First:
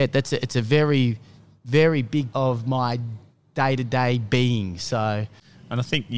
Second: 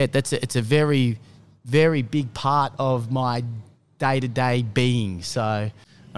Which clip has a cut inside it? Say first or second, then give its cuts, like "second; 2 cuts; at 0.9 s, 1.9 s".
first; 1 cut; at 2.3 s